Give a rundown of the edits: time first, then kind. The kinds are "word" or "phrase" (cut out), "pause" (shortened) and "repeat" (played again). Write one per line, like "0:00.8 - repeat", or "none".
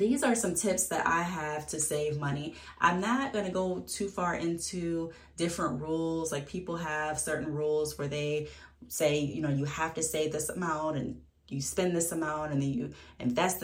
none